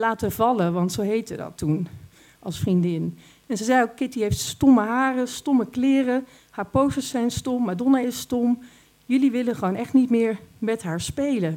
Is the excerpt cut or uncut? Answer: uncut